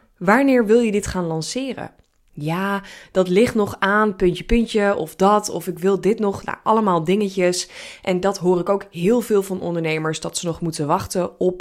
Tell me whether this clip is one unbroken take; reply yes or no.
yes